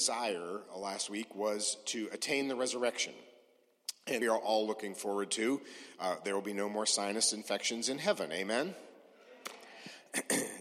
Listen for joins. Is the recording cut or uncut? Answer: cut